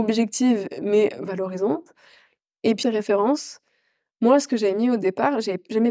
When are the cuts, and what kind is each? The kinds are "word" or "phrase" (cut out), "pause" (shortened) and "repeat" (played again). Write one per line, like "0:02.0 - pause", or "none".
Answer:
0:02.8 - phrase

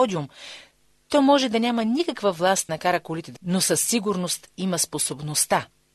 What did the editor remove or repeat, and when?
0:02.7 - word
0:03.4 - word

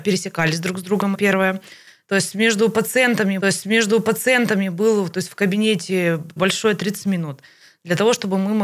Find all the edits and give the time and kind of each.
0:01.1 - word
0:03.4 - repeat
0:06.4 - word

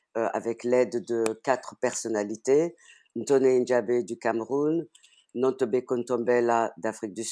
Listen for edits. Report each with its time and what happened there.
none

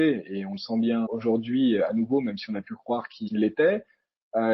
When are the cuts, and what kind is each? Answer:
0:01.1 - word
0:03.3 - word

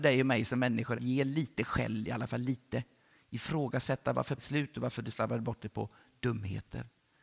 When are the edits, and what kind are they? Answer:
0:00.9 - word
0:04.4 - word

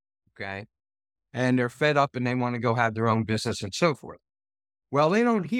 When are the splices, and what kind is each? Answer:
none

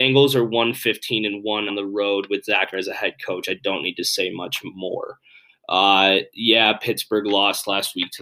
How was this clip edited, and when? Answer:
0:01.7 - word
0:02.7 - word

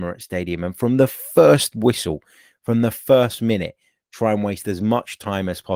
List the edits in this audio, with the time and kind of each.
none

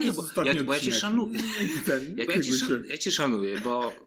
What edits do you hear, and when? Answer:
0:02.3 - word

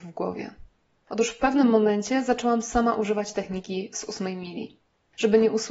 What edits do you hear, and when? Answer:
none

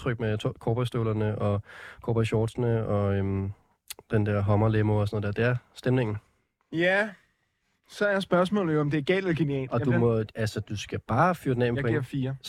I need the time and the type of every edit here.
none

